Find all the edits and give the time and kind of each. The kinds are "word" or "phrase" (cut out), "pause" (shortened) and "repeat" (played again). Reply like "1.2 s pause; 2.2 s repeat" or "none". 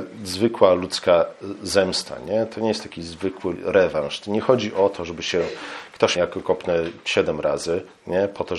3.5 s word; 6.2 s phrase